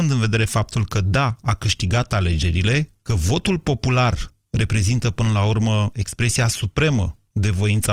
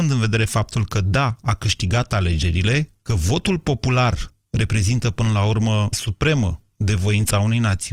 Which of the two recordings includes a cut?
second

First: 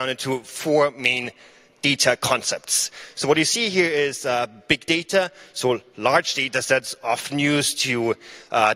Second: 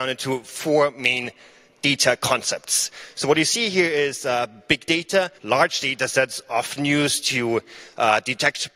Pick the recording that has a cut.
second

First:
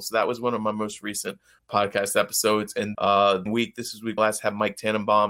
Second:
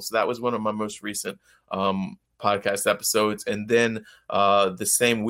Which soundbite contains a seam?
first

